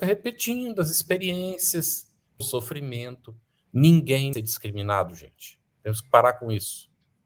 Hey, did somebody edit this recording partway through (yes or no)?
yes